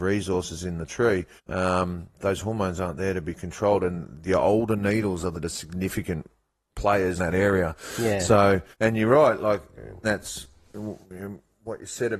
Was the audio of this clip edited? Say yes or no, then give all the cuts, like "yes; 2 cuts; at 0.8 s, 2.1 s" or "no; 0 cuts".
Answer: yes; 6 cuts; at 1.4 s, 5.3 s, 7.2 s, 8.7 s, 10.0 s, 11.0 s